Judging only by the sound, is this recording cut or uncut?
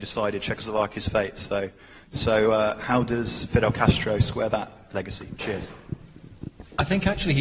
uncut